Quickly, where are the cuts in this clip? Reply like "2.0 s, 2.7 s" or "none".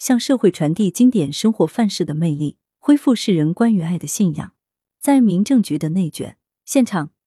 none